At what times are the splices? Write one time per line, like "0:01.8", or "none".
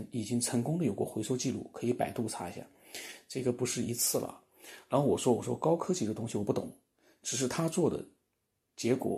none